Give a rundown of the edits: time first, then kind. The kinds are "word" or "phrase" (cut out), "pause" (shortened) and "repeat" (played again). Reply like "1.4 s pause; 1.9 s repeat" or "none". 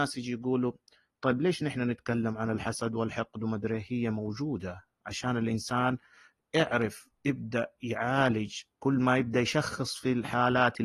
8.7 s pause